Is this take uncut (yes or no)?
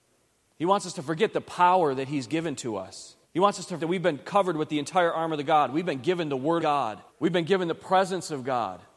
no